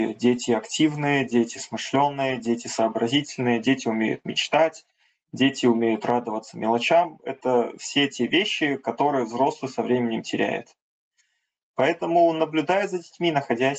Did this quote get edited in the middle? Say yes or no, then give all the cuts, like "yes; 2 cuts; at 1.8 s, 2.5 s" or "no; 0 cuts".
no; 0 cuts